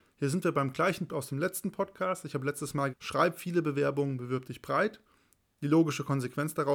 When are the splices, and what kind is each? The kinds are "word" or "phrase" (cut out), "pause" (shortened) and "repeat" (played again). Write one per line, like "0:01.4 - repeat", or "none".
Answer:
0:01.1 - word
0:02.9 - word

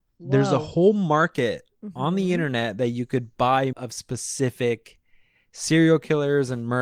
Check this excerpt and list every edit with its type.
0:03.7 - word

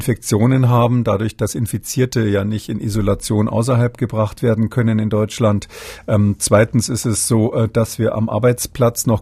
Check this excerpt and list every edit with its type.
none

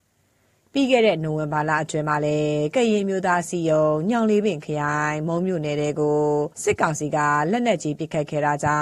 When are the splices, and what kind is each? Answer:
0:06.5 - pause

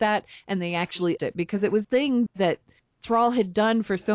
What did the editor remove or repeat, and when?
0:01.2 - word
0:01.8 - word
0:02.3 - word

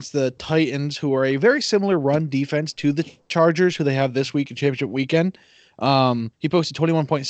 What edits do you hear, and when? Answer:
0:06.3 - pause

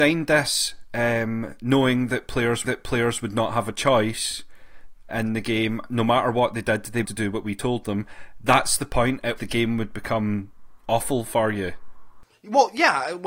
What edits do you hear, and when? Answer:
0:02.6 - repeat
0:05.1 - word
0:07.0 - phrase
0:09.4 - word

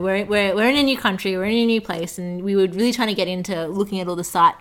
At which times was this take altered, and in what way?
none

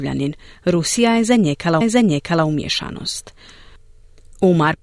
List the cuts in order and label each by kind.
0:01.8 - repeat

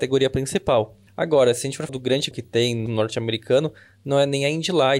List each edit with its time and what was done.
0:01.1 - pause
0:01.9 - word
0:02.3 - word
0:02.9 - word

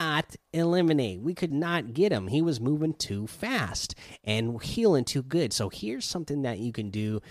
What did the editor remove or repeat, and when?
0:01.5 - word

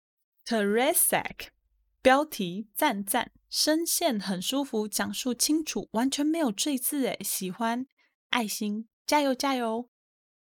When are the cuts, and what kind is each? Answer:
none

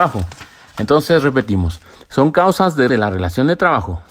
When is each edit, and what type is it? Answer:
0:02.9 - word

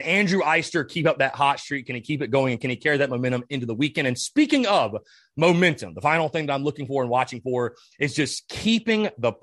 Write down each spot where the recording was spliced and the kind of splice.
none

